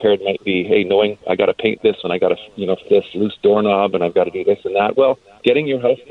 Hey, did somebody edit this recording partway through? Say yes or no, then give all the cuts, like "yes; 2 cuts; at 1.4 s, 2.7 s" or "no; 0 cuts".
yes; 4 cuts; at 1.2 s, 2.0 s, 2.8 s, 3.1 s